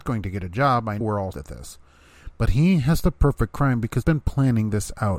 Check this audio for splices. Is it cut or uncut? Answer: cut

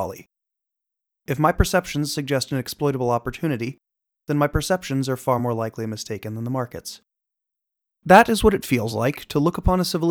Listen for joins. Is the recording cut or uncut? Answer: uncut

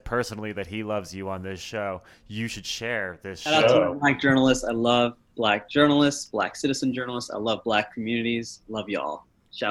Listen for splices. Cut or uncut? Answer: uncut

